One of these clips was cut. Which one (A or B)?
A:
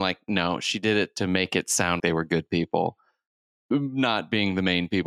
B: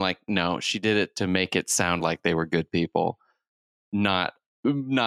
A